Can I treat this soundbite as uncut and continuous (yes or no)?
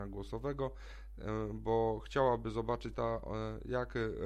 no